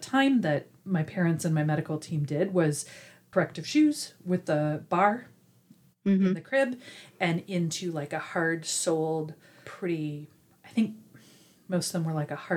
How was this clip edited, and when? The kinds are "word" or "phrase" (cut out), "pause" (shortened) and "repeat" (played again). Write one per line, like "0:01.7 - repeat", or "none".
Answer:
none